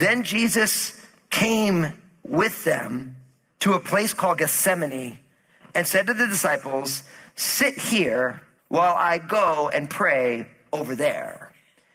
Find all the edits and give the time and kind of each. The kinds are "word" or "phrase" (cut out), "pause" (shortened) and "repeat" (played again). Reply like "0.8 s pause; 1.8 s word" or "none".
8.6 s pause